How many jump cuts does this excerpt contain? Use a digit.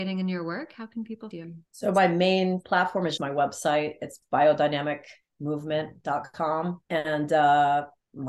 4